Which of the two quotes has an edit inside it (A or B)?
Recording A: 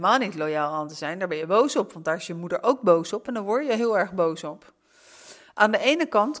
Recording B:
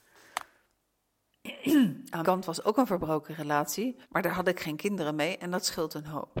B